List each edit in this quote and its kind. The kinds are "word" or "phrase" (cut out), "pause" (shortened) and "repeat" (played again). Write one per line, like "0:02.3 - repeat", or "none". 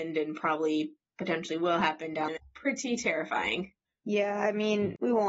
0:02.3 - word